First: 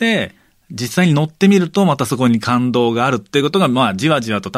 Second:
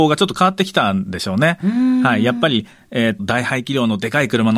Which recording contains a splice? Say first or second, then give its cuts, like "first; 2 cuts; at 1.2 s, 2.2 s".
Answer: second; 1 cut; at 3.2 s